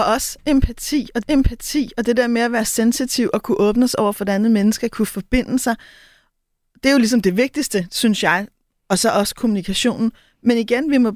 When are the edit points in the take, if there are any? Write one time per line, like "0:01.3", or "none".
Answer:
0:01.2